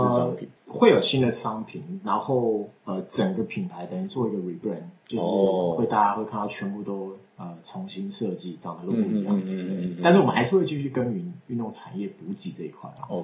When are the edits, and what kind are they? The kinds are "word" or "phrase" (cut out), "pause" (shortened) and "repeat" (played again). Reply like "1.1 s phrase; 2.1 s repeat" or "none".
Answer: 7.3 s pause